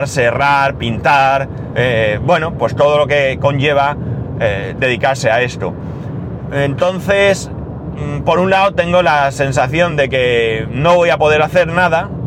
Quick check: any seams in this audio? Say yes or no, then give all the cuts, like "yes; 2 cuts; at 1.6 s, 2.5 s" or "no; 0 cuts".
no; 0 cuts